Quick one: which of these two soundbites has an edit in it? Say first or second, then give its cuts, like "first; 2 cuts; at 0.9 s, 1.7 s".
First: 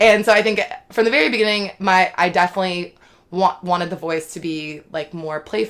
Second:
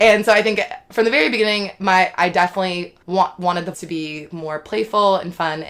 second; 3 cuts; at 3.0 s, 3.7 s, 4.3 s